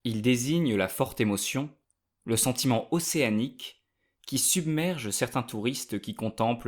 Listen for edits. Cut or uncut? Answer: uncut